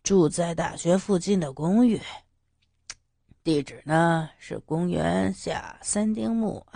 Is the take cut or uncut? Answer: uncut